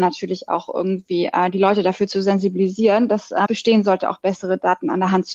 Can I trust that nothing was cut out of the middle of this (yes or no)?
no